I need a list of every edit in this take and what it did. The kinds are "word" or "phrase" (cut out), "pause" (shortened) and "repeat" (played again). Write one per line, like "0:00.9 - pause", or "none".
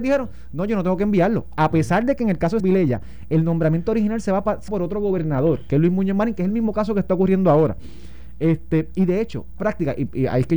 0:02.6 - word
0:04.7 - word
0:09.6 - word